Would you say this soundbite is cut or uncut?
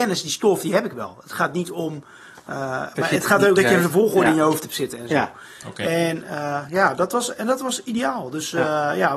cut